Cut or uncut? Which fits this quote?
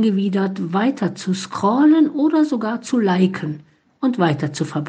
uncut